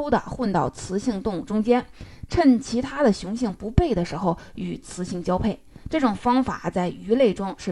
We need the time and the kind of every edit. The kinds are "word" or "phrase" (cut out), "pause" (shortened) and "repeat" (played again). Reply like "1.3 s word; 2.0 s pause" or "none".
none